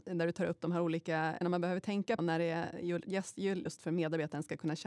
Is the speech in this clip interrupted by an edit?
yes; 3 cuts; at 1.4 s, 2.2 s, 3.7 s

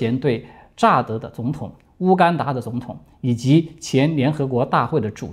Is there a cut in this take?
no; 0 cuts

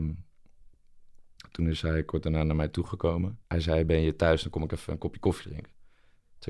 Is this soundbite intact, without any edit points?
no; 1 cut; at 3.5 s

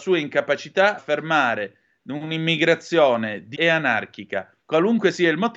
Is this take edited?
yes; 3 cuts; at 1.0 s, 3.5 s, 4.6 s

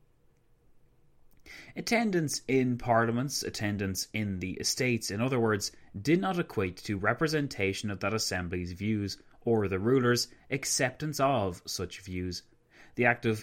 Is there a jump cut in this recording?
no; 0 cuts

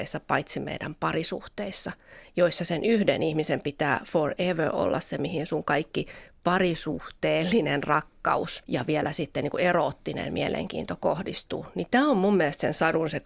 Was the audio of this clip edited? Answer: no; 0 cuts

